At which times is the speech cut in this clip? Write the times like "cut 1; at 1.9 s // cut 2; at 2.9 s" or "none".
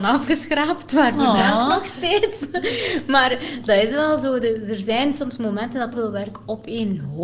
cut 1; at 5.9 s